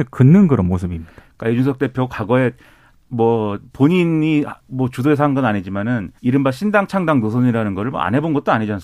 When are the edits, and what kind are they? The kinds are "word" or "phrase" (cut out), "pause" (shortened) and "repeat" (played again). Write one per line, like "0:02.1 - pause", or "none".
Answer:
0:04.6 - pause
0:06.2 - pause